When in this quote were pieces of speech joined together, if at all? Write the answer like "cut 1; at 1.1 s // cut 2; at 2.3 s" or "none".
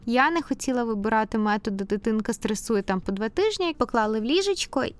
cut 1; at 3.7 s

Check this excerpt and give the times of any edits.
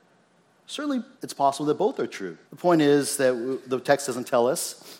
cut 1; at 1.1 s // cut 2; at 2.4 s

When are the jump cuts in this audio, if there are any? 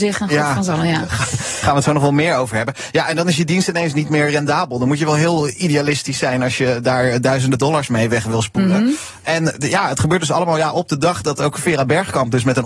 none

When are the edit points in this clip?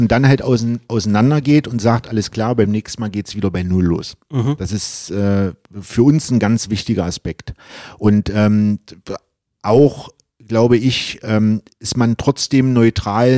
none

